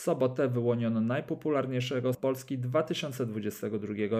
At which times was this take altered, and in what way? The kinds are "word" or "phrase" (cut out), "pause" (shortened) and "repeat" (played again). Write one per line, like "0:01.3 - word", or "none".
0:02.1 - word